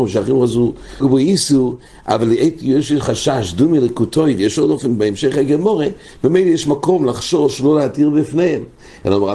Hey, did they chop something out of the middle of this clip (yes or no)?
yes